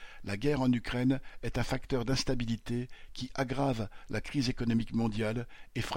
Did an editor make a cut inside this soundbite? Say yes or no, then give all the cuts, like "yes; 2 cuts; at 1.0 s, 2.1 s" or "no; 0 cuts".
no; 0 cuts